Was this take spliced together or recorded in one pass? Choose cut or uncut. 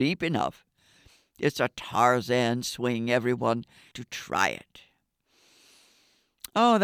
cut